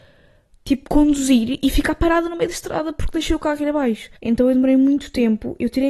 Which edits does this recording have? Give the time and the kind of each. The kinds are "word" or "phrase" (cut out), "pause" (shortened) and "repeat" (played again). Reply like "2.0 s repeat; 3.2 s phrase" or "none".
4.2 s pause